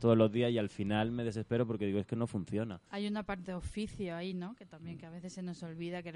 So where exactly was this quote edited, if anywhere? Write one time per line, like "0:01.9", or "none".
0:02.9